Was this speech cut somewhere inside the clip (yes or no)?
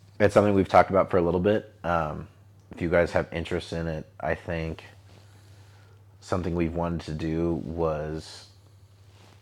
no